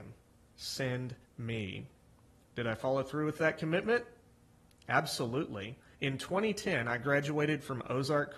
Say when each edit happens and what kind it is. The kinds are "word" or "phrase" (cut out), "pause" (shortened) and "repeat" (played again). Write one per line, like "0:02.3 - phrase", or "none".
0:01.2 - pause
0:05.9 - pause